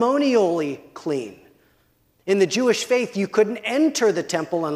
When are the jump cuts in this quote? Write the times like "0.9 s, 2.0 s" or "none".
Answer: none

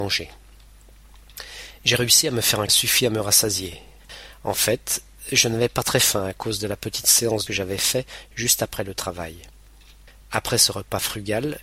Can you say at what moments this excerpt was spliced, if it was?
2.7 s, 7.5 s

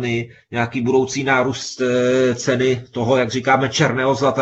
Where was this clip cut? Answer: none

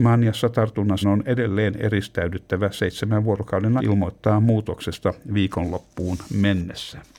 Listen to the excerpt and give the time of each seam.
1.0 s, 3.8 s

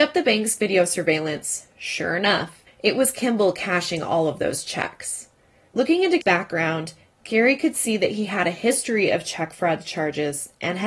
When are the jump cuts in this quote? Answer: 6.2 s

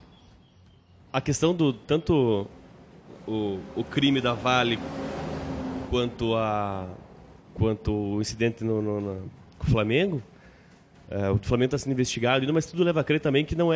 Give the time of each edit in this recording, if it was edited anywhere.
7.4 s

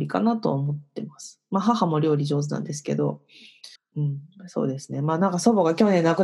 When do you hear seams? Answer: 3.8 s

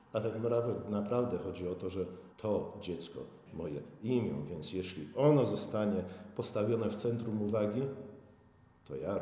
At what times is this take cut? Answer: 2.3 s, 3.5 s

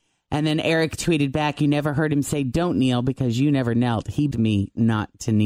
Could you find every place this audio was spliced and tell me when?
4.3 s

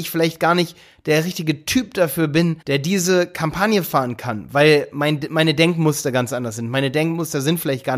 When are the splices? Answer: 2.6 s

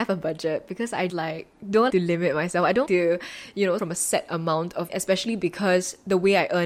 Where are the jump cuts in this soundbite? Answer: 1.1 s, 1.9 s, 2.9 s, 3.8 s, 4.9 s

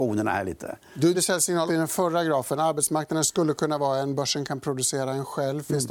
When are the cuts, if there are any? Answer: 1.1 s, 1.7 s

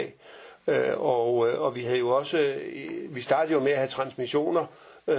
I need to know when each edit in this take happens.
none

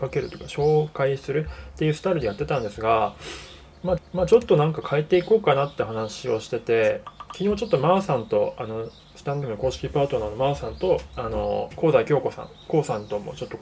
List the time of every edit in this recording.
4.0 s, 9.0 s, 9.4 s

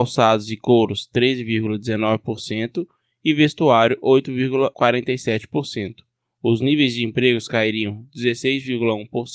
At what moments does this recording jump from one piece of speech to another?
none

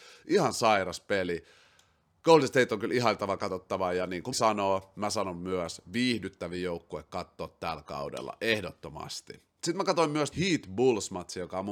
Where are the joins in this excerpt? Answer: 4.3 s, 10.3 s

